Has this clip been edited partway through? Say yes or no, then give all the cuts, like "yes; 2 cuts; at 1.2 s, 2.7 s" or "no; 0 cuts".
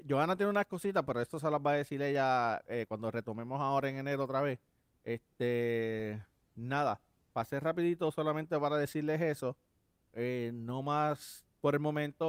no; 0 cuts